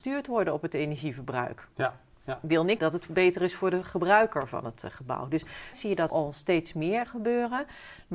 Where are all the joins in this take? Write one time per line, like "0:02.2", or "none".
0:01.7
0:02.8
0:05.7
0:06.1
0:07.1